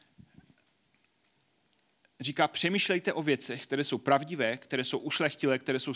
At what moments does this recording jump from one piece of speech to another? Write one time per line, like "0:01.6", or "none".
none

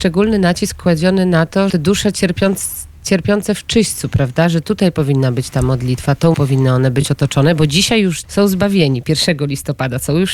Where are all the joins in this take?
0:01.7
0:06.3
0:08.2

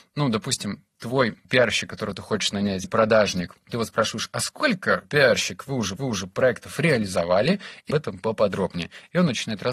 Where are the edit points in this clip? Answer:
0:01.4
0:02.8
0:03.6
0:05.0
0:06.0
0:07.9

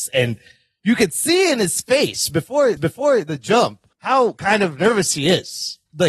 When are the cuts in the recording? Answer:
0:02.8
0:03.9

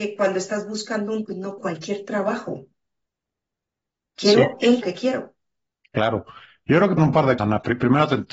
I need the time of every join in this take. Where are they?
0:01.2
0:01.6
0:04.8
0:07.0
0:07.4

